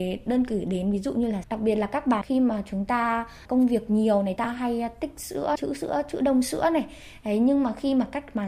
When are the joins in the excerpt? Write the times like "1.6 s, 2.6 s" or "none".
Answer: 1.4 s, 2.2 s, 4.4 s, 5.6 s